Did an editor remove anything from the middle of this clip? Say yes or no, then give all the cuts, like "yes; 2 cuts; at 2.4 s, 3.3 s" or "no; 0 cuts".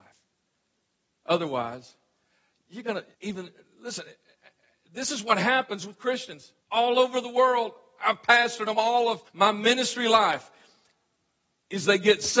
yes; 3 cuts; at 3.1 s, 6.6 s, 9.3 s